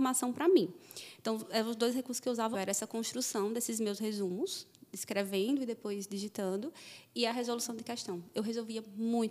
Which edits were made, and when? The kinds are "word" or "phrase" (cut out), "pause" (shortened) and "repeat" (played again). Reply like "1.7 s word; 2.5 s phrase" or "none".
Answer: 2.5 s word